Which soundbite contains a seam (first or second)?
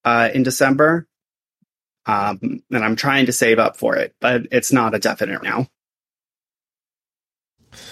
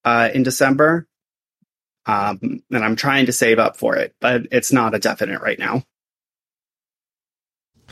first